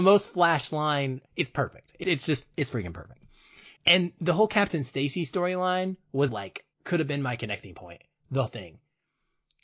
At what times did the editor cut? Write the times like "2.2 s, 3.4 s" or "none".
1.3 s, 2.0 s, 3.8 s, 6.3 s, 6.7 s, 8.5 s